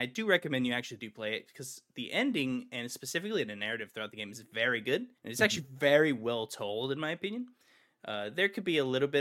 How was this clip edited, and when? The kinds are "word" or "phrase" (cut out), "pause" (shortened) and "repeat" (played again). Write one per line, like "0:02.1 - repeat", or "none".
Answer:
0:05.2 - pause